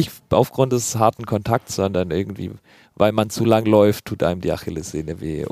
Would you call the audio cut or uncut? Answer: uncut